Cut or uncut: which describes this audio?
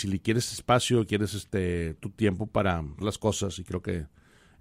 cut